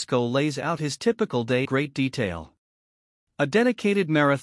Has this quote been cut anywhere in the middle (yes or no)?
yes